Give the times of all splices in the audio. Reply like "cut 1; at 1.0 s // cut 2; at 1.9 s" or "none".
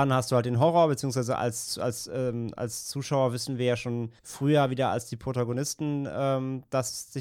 cut 1; at 4.2 s